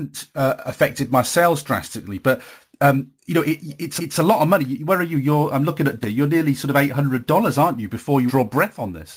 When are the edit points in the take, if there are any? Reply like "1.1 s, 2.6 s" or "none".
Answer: 3.2 s, 4.0 s, 6.0 s, 8.3 s